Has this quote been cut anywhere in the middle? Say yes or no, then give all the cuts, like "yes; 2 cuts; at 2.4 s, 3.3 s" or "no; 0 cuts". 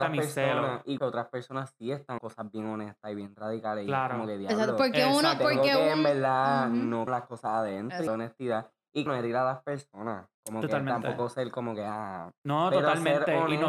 yes; 6 cuts; at 1.0 s, 2.2 s, 7.1 s, 8.1 s, 9.1 s, 10.3 s